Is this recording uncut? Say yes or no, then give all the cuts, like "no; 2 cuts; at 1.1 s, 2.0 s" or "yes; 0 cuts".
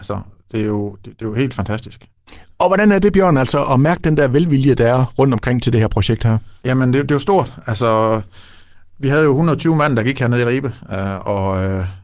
no; 1 cut; at 6.6 s